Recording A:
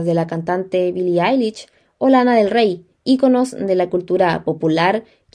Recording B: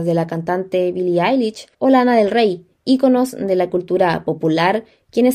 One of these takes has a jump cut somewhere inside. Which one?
B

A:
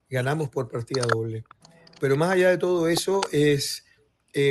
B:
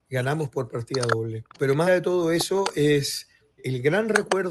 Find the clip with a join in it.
B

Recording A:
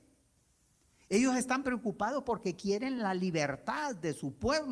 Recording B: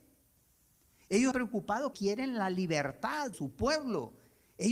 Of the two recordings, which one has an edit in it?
B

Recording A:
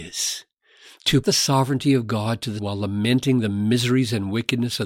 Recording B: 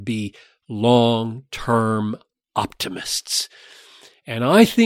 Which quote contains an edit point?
A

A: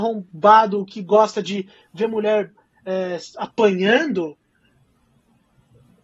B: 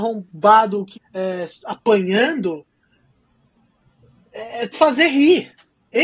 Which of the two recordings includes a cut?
B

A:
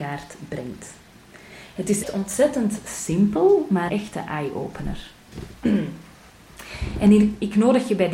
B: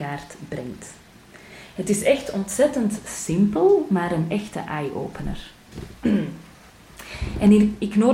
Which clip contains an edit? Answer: A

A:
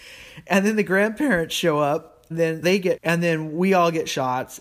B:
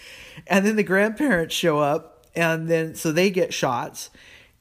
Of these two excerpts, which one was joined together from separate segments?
A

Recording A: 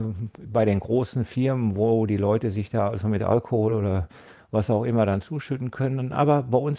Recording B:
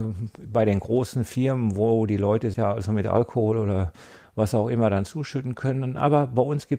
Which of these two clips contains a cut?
B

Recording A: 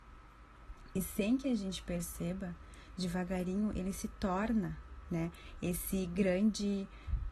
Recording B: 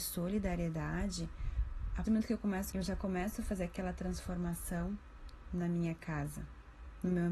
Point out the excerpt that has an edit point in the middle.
B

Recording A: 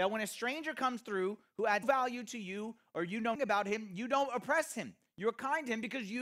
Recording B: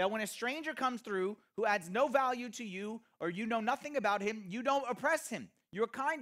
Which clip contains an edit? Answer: A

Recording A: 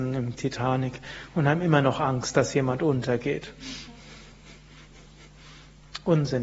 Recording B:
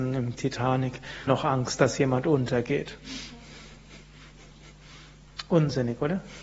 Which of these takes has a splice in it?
B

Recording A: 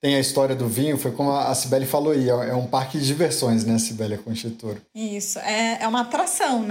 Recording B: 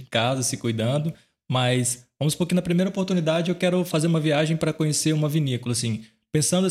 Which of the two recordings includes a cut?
A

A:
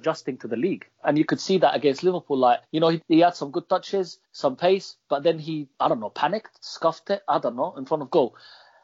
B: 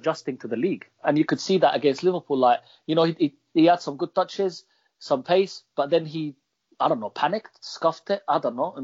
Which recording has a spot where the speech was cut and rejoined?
A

